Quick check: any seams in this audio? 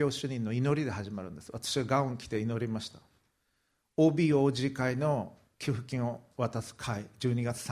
no; 0 cuts

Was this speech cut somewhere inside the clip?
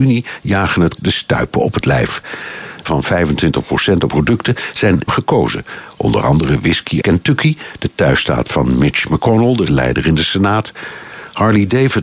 yes; 6 cuts; at 1.0 s, 2.9 s, 4.1 s, 5.1 s, 7.0 s, 9.7 s

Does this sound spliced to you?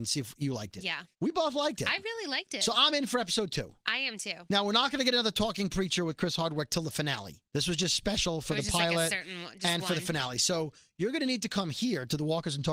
yes; 1 cut; at 1.1 s

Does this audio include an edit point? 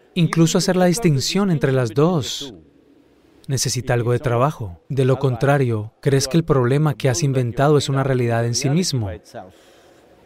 yes; 1 cut; at 4.8 s

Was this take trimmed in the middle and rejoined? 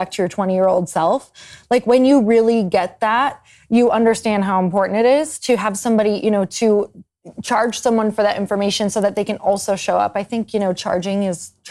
no; 0 cuts

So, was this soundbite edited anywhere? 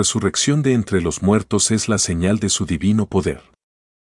no; 0 cuts

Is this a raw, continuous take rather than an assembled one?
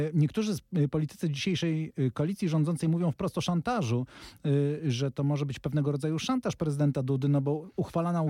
yes; 0 cuts

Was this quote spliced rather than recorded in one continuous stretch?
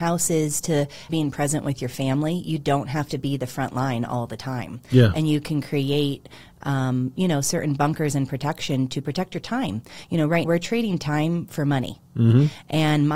yes; 2 cuts; at 1.1 s, 10.4 s

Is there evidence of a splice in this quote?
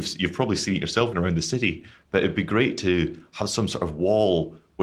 yes; 1 cut; at 1.1 s

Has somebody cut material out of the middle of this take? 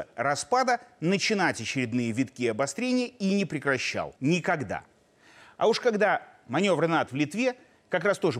yes; 2 cuts; at 4.2 s, 7.1 s

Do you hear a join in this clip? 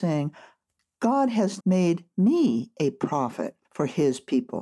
yes; 2 cuts; at 1.6 s, 3.6 s

